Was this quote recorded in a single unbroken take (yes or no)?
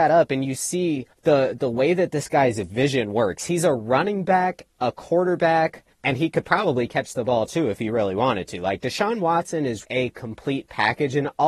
no